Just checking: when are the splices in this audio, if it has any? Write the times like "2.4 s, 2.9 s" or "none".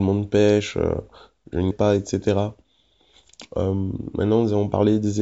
1.7 s